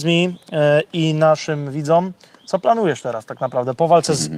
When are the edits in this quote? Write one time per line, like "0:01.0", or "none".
none